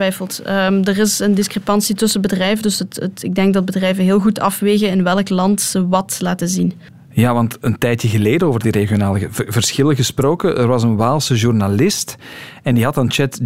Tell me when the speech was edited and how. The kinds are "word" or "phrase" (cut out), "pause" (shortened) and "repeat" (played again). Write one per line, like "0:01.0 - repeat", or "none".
none